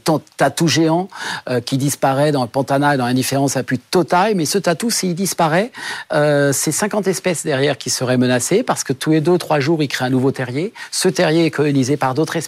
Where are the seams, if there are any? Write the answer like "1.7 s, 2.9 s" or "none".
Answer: none